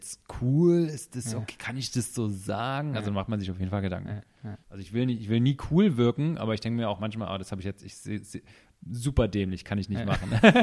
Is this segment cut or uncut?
cut